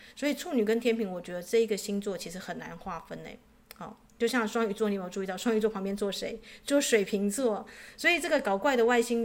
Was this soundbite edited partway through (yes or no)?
yes